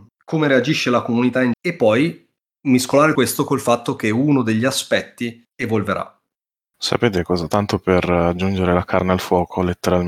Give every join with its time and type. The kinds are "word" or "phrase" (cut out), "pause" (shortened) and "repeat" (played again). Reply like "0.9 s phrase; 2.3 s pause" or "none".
1.5 s word; 3.1 s word